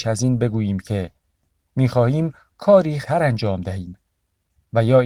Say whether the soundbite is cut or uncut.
cut